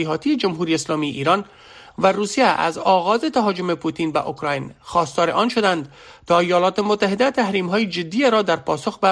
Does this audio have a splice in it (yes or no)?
no